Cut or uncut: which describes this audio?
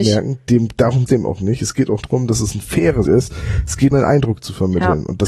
cut